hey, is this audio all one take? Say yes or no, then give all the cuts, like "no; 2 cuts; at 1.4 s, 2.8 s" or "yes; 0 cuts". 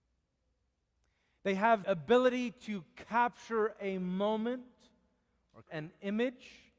no; 2 cuts; at 1.8 s, 5.7 s